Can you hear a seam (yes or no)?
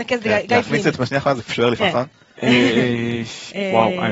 yes